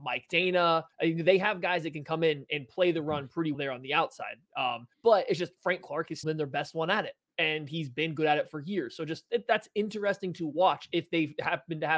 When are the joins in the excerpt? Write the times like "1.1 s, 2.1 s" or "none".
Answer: 0.9 s, 3.5 s, 4.9 s, 6.2 s